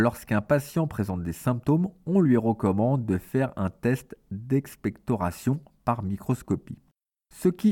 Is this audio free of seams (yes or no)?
yes